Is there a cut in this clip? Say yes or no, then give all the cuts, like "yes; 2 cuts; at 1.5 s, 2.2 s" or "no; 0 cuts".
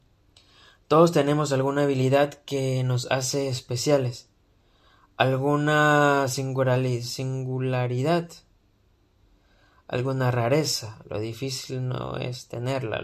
no; 0 cuts